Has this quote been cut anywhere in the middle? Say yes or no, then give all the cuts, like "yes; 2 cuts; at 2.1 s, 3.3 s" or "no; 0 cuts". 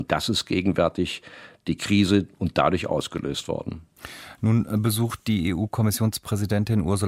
no; 0 cuts